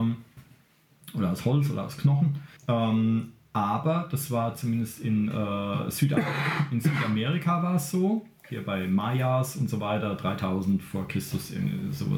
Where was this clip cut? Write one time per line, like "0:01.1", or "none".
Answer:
0:02.6